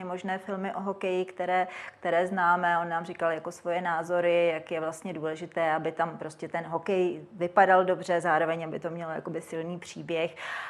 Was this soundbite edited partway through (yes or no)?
no